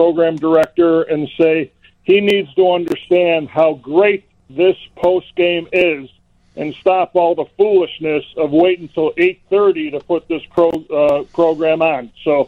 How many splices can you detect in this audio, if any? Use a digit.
0